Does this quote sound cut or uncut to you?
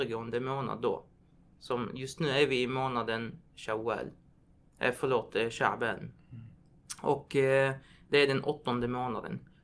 uncut